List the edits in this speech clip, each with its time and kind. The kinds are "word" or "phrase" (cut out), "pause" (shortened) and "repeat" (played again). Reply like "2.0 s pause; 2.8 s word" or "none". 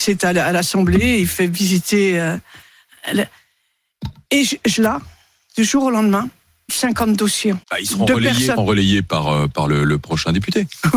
4.8 s word; 6.7 s word; 7.6 s pause; 8.6 s phrase